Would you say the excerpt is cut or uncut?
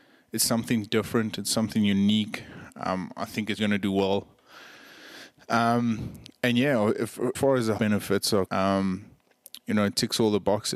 cut